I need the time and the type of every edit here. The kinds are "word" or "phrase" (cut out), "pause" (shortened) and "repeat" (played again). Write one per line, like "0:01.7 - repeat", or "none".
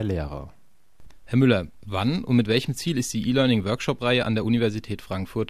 none